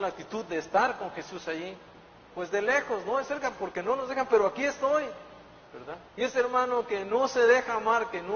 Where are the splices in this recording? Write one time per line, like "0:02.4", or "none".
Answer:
0:02.1
0:06.1